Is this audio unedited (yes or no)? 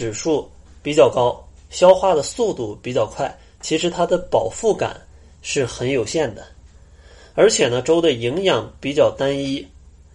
yes